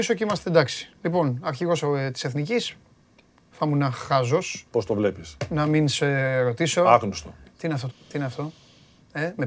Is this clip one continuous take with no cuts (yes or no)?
no